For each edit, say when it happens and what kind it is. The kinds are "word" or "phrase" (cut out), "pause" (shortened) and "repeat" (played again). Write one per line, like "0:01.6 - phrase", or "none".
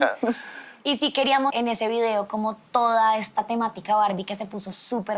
0:01.5 - word
0:02.7 - pause